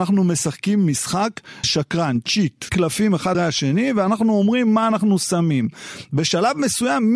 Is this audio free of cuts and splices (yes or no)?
no